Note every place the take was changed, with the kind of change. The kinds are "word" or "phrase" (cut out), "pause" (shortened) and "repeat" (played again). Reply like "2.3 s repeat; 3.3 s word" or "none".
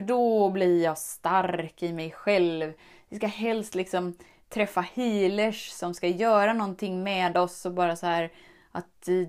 none